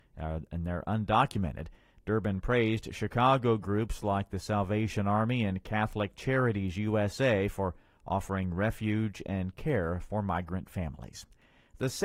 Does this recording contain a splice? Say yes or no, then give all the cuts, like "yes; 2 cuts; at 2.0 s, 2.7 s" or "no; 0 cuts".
no; 0 cuts